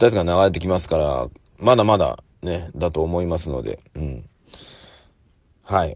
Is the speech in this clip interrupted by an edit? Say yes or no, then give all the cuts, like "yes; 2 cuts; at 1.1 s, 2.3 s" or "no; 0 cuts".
no; 0 cuts